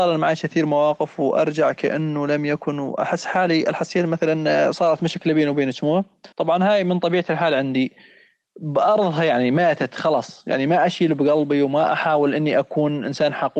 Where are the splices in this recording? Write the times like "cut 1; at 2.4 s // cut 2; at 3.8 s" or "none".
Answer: cut 1; at 6.3 s